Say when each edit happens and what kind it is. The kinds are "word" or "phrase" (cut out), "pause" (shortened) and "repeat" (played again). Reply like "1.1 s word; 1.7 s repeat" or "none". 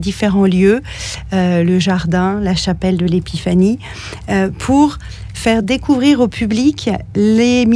none

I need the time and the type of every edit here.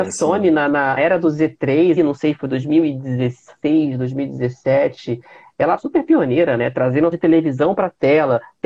1.0 s word; 2.0 s word; 5.8 s word; 7.1 s word

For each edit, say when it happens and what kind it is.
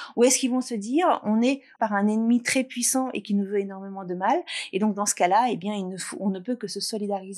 1.8 s phrase

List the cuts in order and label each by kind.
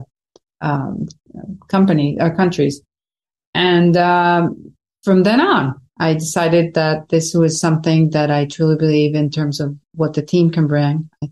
none

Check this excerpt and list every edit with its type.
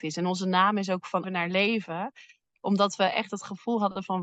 1.2 s word

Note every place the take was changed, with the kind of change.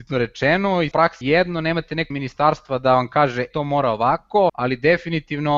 0.9 s word; 1.2 s word; 2.1 s word; 3.5 s word; 4.5 s word

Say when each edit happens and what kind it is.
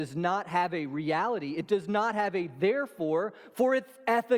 none

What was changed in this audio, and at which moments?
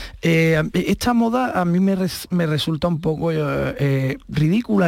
none

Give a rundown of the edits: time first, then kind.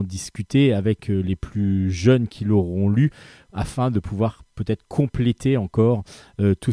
none

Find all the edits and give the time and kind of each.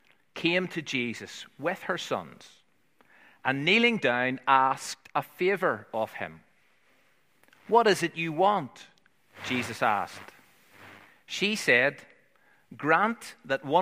none

